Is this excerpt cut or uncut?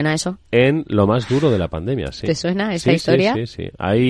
uncut